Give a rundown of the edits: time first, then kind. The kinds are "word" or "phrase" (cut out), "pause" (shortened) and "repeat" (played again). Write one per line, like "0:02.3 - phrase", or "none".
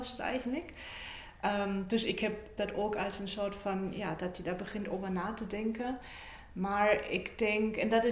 0:02.6 - phrase